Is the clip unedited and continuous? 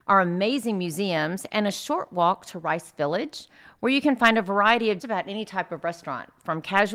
no; 1 cut; at 5.0 s

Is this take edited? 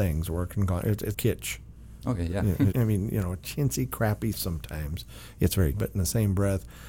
yes; 5 cuts; at 1.1 s, 2.7 s, 3.4 s, 4.3 s, 5.7 s

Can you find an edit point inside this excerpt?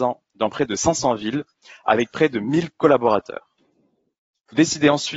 no; 0 cuts

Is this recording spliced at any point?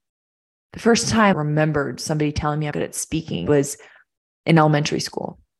yes; 3 cuts; at 1.3 s, 2.7 s, 3.5 s

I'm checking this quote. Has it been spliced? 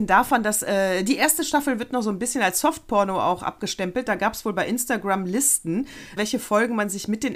yes; 1 cut; at 6.2 s

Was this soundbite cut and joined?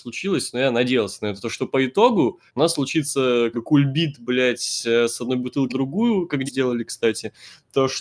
yes; 4 cuts; at 2.5 s, 3.5 s, 5.7 s, 6.5 s

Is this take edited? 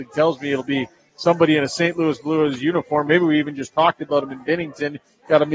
no; 0 cuts

